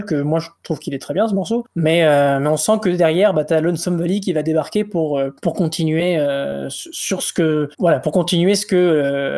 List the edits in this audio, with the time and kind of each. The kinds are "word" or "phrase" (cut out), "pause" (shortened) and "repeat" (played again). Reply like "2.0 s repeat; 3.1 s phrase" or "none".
5.4 s pause